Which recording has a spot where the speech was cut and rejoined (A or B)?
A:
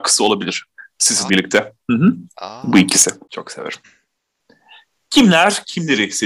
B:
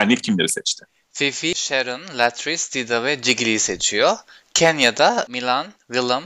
A